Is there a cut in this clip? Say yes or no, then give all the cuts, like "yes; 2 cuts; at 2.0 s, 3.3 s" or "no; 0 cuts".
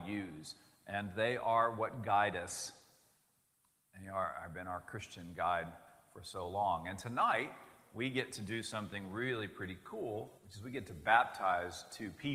yes; 1 cut; at 10.4 s